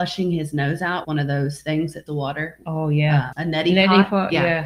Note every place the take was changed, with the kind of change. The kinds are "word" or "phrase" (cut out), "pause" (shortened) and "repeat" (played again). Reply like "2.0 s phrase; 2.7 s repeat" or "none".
1.0 s word; 2.1 s word; 3.3 s word